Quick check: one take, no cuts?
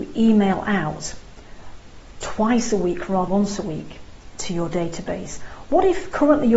no; 1 cut; at 3.3 s

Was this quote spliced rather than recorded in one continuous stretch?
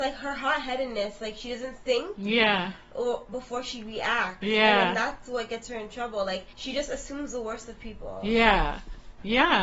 yes; 1 cut; at 6.5 s

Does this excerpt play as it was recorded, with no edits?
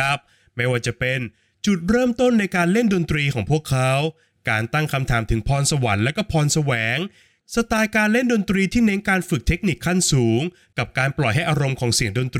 yes; 0 cuts

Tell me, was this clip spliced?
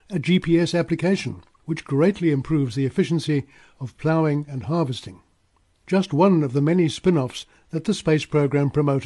no; 0 cuts

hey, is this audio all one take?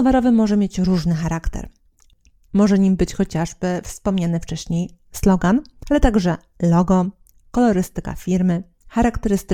yes; 0 cuts

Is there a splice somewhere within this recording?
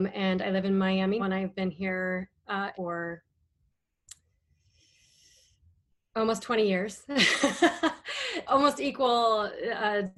yes; 3 cuts; at 1.2 s, 2.7 s, 8.5 s

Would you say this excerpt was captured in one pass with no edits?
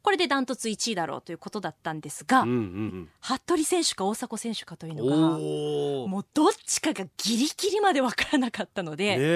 no; 1 cut; at 2.9 s

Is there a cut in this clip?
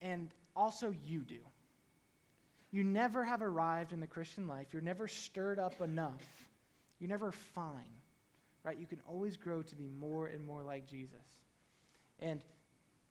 no; 0 cuts

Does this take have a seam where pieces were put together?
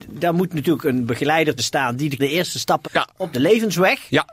yes; 3 cuts; at 1.6 s, 2.2 s, 2.8 s

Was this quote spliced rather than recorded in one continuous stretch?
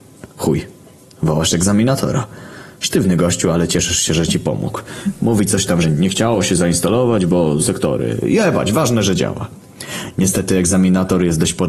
yes; 2 cuts; at 5.8 s, 7.6 s

